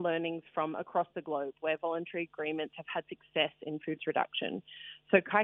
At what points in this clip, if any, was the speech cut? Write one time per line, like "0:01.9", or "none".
0:04.0